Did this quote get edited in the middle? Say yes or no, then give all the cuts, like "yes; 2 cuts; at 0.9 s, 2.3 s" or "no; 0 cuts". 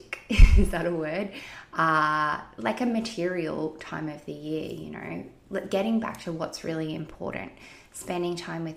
no; 0 cuts